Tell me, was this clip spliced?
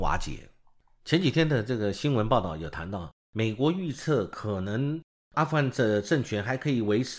no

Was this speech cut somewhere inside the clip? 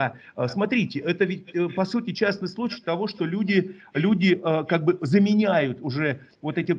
no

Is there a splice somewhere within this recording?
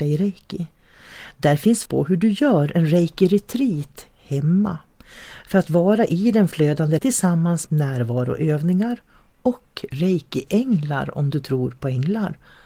yes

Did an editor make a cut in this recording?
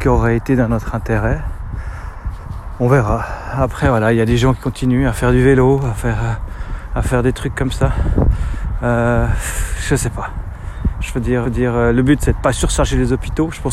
yes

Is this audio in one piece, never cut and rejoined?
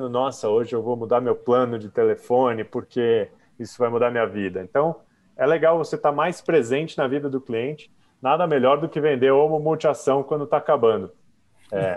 yes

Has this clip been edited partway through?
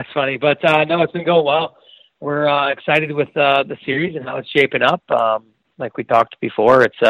no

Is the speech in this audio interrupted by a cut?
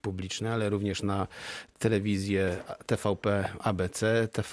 no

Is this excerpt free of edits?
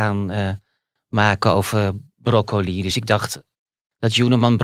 yes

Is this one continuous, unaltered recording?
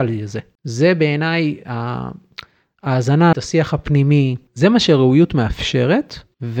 no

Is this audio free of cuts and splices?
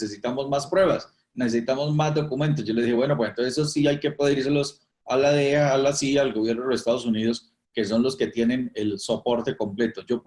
yes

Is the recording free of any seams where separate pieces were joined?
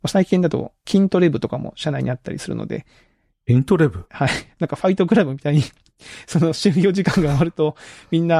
yes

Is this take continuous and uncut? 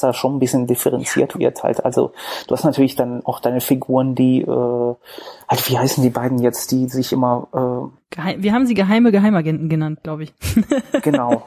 yes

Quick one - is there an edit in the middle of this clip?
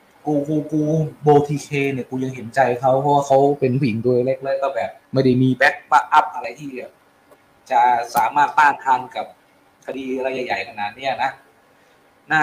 yes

